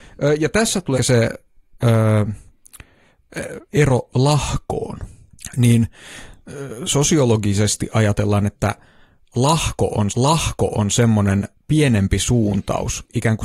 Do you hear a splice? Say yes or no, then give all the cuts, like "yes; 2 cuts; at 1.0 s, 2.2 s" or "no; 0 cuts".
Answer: yes; 3 cuts; at 0.9 s, 3.7 s, 10.1 s